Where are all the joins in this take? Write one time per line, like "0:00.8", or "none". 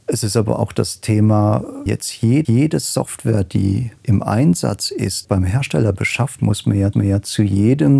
0:01.9
0:02.4
0:04.0
0:05.2
0:06.4
0:06.9